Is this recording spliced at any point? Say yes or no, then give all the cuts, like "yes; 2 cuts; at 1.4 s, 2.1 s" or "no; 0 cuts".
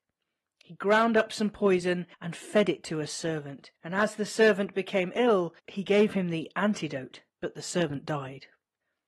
yes; 4 cuts; at 2.1 s, 3.8 s, 5.6 s, 7.3 s